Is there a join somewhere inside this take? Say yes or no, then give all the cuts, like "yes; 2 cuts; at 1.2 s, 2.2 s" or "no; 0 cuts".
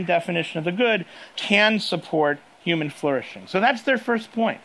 yes; 1 cut; at 1.4 s